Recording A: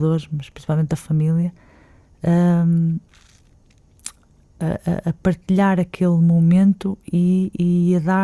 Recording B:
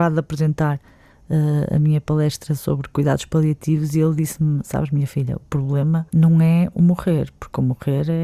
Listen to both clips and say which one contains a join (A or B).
B